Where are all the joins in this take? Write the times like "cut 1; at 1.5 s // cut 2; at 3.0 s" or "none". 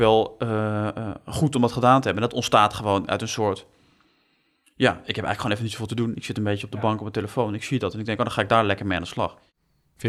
none

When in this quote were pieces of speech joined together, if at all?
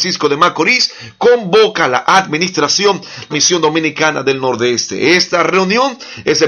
cut 1; at 3.3 s

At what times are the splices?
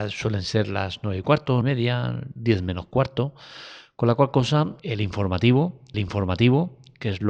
cut 1; at 1.6 s // cut 2; at 4.8 s // cut 3; at 5.9 s

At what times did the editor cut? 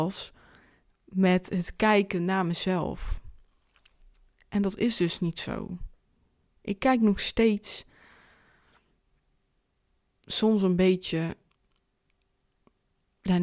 none

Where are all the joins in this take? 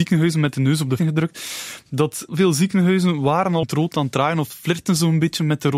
cut 1; at 1.0 s // cut 2; at 2.3 s // cut 3; at 3.6 s

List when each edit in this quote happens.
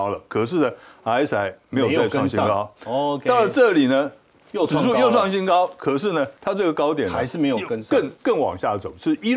cut 1; at 6.4 s // cut 2; at 8.2 s

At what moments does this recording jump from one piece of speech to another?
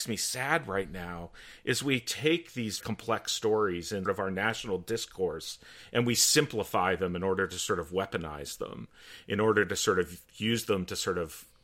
cut 1; at 2.8 s // cut 2; at 4.1 s

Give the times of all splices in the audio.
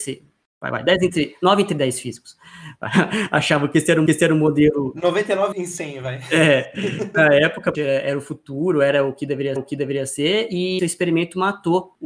cut 1; at 4.1 s // cut 2; at 5.5 s // cut 3; at 7.7 s // cut 4; at 9.6 s // cut 5; at 10.8 s

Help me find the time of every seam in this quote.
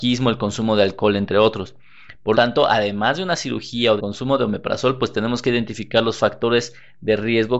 cut 1; at 2.3 s // cut 2; at 4.0 s

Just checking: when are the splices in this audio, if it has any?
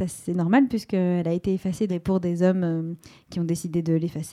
cut 1; at 1.9 s

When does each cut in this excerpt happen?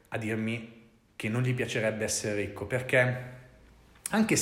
none

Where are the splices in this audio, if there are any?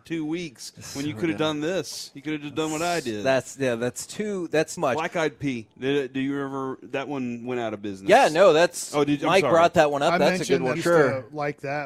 cut 1; at 1.4 s // cut 2; at 4.8 s // cut 3; at 10.8 s

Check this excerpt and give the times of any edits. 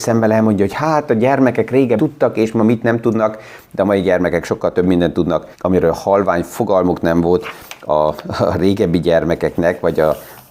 cut 1; at 2.0 s // cut 2; at 5.5 s

